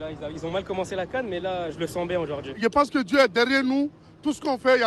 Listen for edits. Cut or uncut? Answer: uncut